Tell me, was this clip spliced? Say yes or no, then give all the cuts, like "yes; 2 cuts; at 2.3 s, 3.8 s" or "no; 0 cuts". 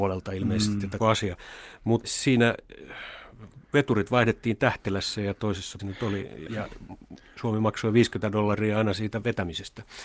yes; 5 cuts; at 1.0 s, 2.0 s, 3.6 s, 5.8 s, 6.5 s